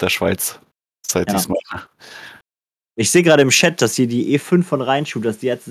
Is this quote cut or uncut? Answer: cut